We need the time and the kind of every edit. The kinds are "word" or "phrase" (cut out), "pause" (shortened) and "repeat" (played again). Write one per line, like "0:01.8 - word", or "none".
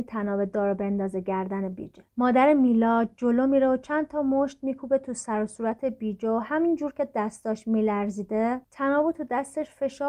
0:02.1 - pause

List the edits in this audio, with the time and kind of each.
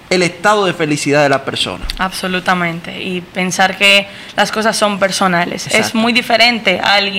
none

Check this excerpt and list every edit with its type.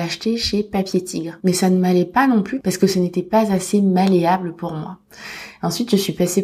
none

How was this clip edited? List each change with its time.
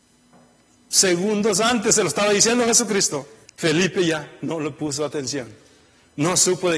0:03.5 - pause

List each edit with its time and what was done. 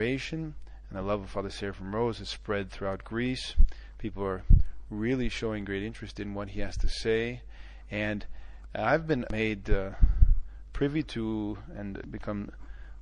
none

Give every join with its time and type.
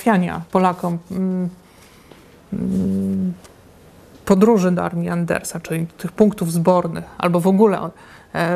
none

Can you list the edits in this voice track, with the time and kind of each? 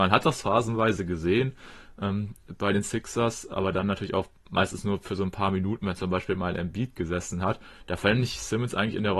none

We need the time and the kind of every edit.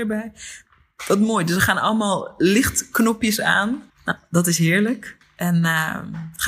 0:03.9 - pause

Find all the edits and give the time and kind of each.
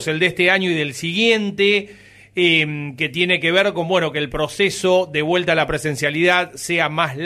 none

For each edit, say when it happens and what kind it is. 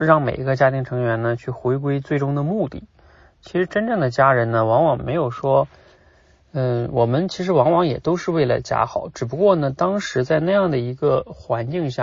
none

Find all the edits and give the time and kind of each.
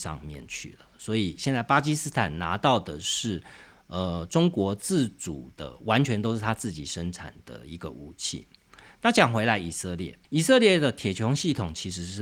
0:10.2 - pause

